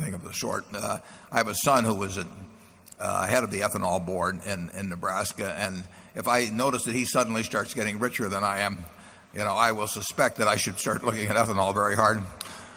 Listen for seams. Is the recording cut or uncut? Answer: cut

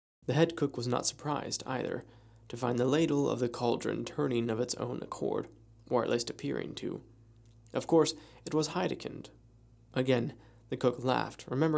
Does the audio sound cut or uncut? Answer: uncut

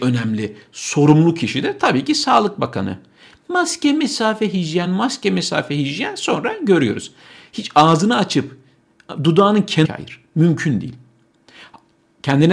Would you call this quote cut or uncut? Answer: uncut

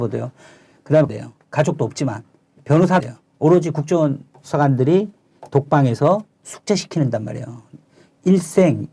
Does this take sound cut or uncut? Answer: cut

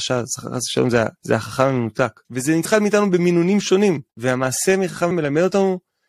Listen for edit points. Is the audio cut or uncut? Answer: cut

